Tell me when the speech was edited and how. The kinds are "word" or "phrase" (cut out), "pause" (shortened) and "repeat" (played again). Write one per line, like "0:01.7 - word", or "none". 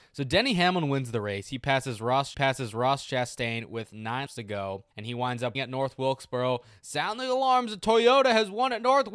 0:02.3 - repeat
0:04.3 - word
0:04.9 - pause
0:05.5 - word